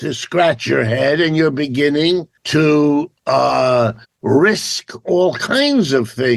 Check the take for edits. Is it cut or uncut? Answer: cut